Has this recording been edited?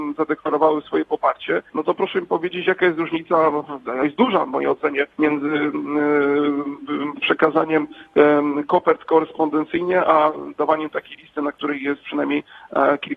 yes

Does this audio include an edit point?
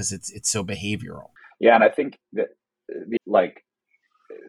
yes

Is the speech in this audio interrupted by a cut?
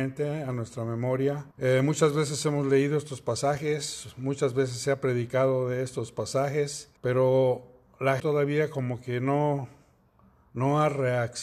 yes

